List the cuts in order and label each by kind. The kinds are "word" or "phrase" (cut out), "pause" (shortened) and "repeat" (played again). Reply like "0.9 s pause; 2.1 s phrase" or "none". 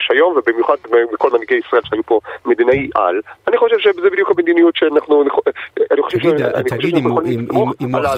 none